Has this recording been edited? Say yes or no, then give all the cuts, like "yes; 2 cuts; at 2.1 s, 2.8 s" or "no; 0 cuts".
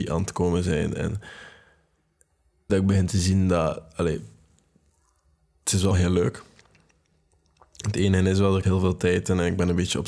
yes; 3 cuts; at 2.7 s, 5.9 s, 8.6 s